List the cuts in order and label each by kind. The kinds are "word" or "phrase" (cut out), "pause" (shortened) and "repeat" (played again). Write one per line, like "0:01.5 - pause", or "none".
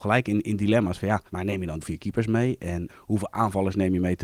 0:01.3 - pause
0:01.8 - phrase
0:02.9 - word